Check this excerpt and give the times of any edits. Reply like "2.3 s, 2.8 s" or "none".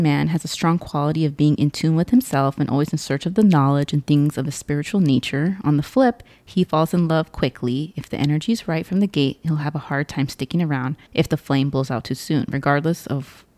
11.1 s